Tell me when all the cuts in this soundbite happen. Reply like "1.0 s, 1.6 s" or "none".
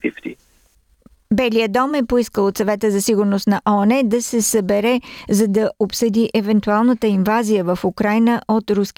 none